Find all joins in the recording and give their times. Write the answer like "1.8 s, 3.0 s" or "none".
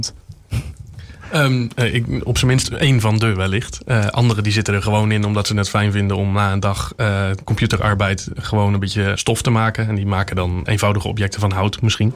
9.2 s, 10.7 s